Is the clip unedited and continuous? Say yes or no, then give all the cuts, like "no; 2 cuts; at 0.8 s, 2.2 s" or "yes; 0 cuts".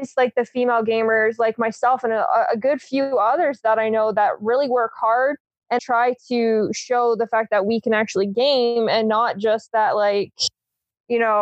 no; 1 cut; at 5.8 s